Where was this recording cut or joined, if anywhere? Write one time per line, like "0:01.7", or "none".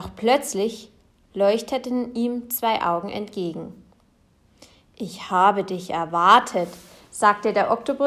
none